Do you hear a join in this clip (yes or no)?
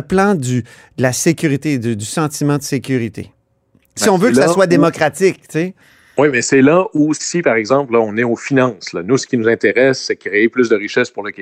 no